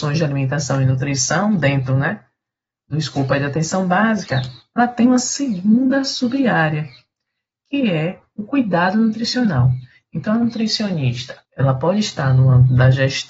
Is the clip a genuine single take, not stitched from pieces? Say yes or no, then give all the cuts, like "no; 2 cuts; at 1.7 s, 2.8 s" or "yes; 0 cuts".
no; 1 cut; at 11.4 s